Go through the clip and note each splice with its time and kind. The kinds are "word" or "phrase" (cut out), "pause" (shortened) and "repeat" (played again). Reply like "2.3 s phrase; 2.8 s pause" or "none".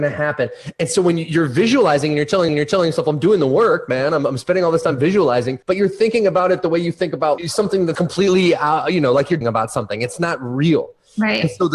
2.5 s repeat; 5.6 s pause; 7.4 s word; 7.9 s word; 9.4 s word